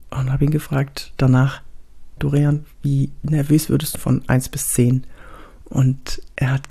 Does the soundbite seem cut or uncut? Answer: cut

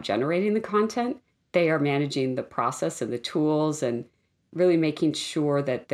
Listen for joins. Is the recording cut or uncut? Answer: uncut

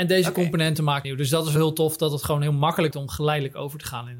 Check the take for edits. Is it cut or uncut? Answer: cut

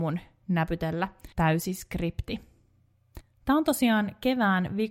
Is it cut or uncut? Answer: cut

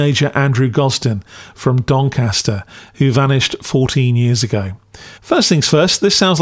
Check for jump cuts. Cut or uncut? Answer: cut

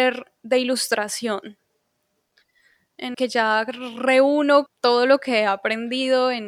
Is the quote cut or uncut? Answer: cut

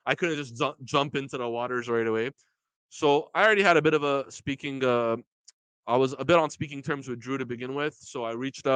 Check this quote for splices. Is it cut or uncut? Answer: uncut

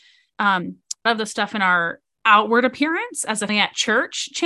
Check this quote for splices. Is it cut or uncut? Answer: cut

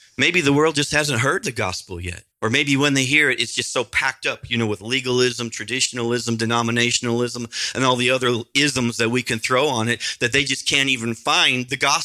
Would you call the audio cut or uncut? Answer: cut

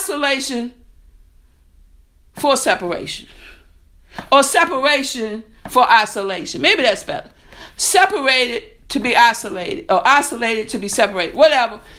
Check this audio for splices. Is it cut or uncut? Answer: uncut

